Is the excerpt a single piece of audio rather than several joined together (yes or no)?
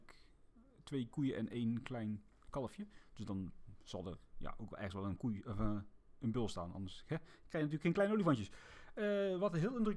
yes